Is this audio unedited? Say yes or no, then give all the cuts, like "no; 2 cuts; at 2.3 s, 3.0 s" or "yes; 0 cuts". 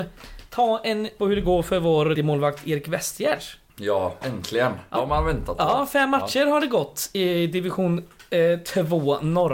no; 4 cuts; at 1.2 s, 2.1 s, 4.2 s, 5.0 s